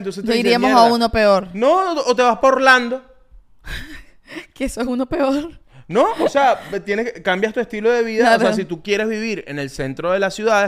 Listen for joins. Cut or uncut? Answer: uncut